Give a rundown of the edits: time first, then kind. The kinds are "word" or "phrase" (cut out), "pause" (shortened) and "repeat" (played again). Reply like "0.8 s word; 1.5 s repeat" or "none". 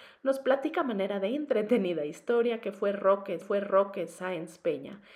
3.4 s repeat